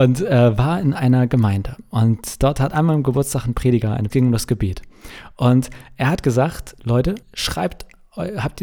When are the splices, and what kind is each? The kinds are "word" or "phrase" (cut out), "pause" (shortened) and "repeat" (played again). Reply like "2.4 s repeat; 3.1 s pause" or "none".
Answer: 4.1 s phrase; 7.2 s pause